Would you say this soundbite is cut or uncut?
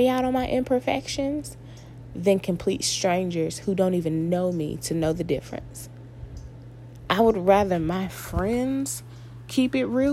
uncut